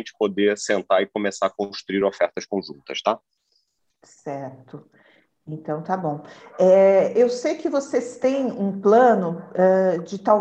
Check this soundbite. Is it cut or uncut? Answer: uncut